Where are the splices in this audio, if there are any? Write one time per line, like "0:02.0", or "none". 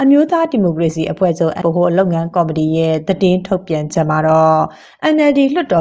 0:01.6